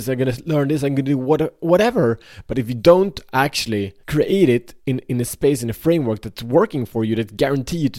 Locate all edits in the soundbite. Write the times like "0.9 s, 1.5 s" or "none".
4.0 s, 4.8 s